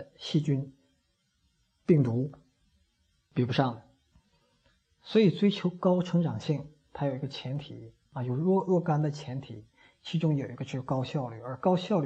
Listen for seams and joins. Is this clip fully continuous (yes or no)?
no